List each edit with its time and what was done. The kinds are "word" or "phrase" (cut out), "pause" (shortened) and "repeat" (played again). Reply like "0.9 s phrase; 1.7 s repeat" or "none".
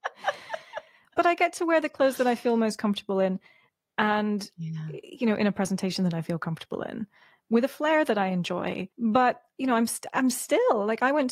8.9 s pause

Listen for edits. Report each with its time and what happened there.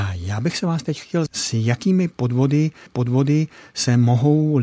1.3 s word; 2.9 s repeat

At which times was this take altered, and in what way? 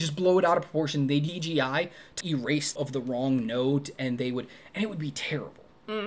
1.3 s word; 2.2 s word; 2.8 s word

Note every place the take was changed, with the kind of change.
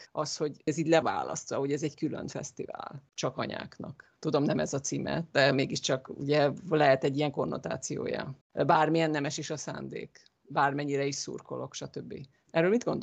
1.0 s word; 3.1 s pause; 8.4 s pause

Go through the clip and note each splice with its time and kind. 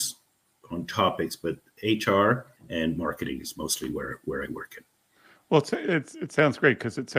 2.6 s pause

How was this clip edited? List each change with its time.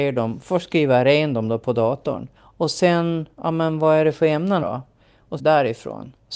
2.4 s pause; 3.3 s pause; 4.6 s word; 5.4 s phrase

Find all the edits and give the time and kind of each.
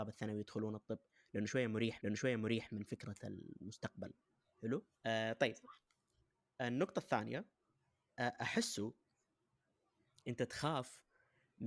2.0 s repeat; 4.9 s pause

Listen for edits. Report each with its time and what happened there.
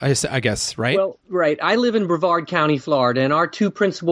1.2 s pause

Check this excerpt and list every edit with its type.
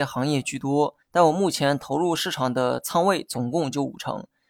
1.0 s pause

